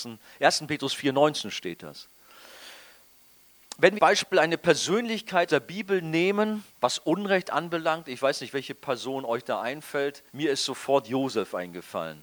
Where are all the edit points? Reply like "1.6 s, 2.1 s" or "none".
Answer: 4.0 s, 5.5 s, 6.7 s, 10.3 s